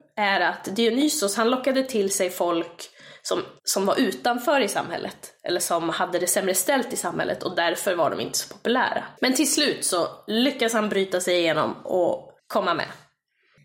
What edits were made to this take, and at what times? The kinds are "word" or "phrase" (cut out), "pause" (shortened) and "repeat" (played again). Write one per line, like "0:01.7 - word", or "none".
0:03.6 - pause
0:09.2 - pause
0:12.4 - pause